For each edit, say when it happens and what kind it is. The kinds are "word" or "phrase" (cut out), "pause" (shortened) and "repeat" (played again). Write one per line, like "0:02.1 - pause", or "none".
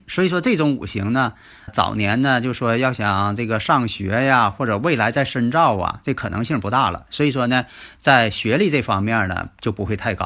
0:01.7 - word